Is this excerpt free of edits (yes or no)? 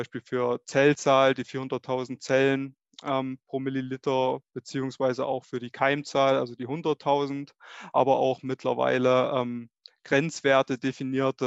yes